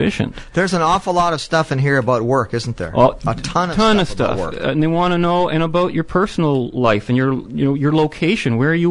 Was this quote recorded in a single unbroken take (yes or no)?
no